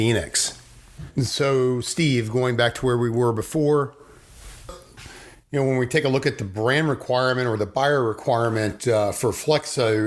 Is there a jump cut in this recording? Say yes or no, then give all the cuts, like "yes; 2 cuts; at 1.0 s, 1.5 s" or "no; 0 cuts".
no; 0 cuts